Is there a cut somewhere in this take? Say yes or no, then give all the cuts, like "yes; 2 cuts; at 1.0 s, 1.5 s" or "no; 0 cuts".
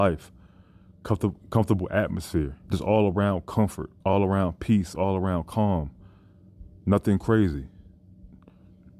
yes; 2 cuts; at 2.6 s, 4.0 s